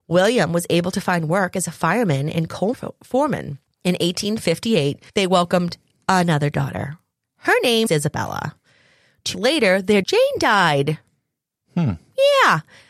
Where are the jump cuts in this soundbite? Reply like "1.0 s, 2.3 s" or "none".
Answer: 2.7 s, 3.7 s, 5.1 s, 7.9 s, 9.3 s, 10.0 s